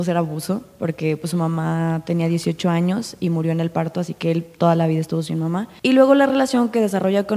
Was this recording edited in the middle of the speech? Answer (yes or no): no